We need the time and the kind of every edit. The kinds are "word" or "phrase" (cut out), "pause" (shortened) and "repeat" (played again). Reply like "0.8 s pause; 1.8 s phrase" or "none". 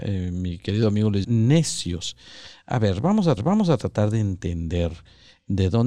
1.2 s word; 3.4 s repeat